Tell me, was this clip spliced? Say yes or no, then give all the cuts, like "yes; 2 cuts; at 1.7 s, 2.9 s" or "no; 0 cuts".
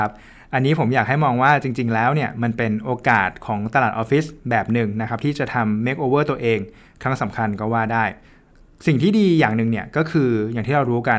no; 0 cuts